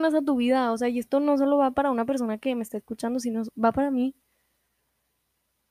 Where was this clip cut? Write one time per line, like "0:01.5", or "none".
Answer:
none

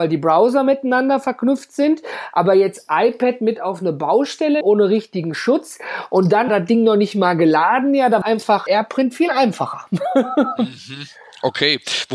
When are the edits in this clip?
0:04.6
0:06.5
0:08.2
0:08.7

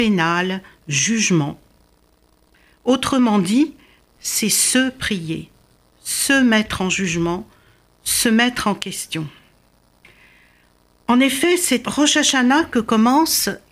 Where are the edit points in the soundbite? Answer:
0:04.1
0:11.8

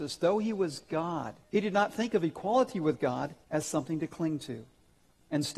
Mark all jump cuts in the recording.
0:01.4
0:03.4

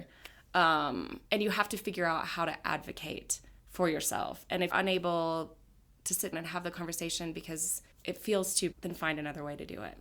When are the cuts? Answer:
0:01.3
0:03.6
0:04.7
0:06.3
0:07.9
0:08.7

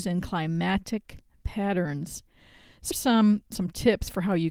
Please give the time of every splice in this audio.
0:02.9
0:03.5

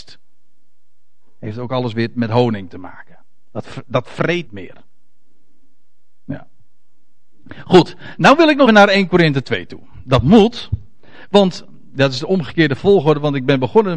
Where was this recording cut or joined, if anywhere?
0:04.5
0:08.7

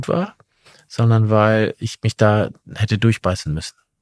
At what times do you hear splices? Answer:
none

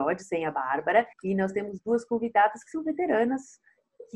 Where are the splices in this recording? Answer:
0:01.1

